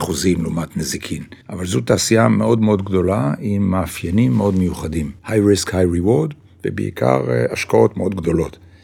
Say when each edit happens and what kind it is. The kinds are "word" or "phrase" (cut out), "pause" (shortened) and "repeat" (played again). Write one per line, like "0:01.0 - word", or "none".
0:01.4 - pause
0:05.2 - pause